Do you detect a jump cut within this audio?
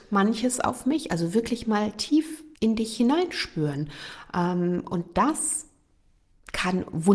yes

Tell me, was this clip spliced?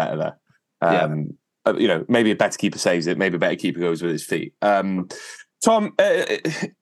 no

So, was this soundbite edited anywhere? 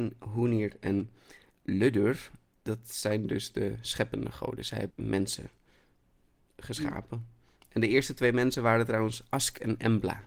yes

